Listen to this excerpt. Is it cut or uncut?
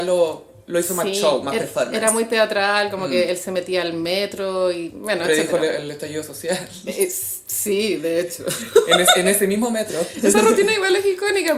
uncut